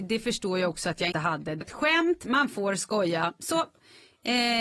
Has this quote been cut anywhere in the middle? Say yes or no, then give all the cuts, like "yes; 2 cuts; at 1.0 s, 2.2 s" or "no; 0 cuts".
yes; 2 cuts; at 1.1 s, 1.6 s